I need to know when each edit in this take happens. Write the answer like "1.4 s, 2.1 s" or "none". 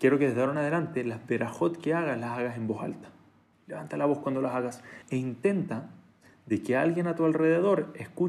3.5 s, 5.0 s